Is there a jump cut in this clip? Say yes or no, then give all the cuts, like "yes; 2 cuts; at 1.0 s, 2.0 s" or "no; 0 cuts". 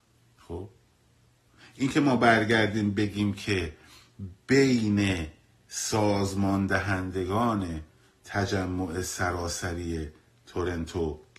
no; 0 cuts